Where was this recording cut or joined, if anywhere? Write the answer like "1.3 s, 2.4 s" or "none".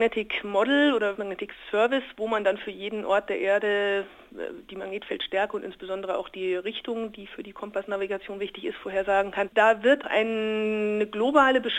1.1 s, 9.5 s, 10.0 s